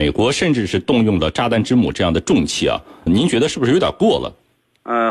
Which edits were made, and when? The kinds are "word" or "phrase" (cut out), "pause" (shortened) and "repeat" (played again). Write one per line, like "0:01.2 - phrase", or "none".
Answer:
0:03.1 - word